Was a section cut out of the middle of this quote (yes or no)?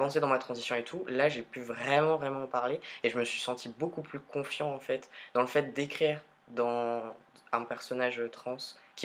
no